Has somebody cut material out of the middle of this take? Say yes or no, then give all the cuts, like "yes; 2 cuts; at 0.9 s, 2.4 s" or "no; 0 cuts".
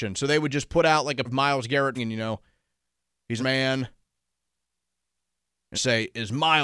yes; 4 cuts; at 1.3 s, 2.0 s, 3.4 s, 5.7 s